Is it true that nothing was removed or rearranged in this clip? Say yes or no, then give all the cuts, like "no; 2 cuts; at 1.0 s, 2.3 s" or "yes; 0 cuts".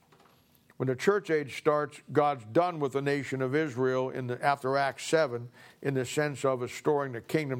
yes; 0 cuts